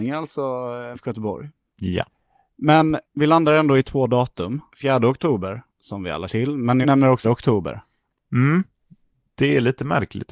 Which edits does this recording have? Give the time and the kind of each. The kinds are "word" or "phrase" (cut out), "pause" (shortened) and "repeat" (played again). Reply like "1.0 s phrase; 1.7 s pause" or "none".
0.9 s phrase; 3.0 s pause; 4.7 s pause; 5.7 s pause; 6.3 s word; 6.8 s word; 7.2 s word